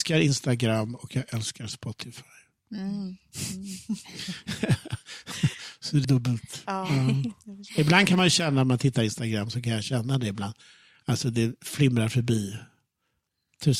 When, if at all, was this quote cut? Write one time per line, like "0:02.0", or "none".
0:06.0